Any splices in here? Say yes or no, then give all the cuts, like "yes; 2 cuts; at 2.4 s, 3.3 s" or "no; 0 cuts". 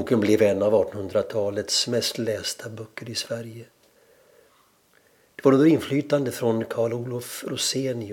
no; 0 cuts